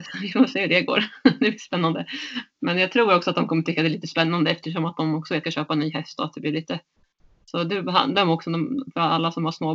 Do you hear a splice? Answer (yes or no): yes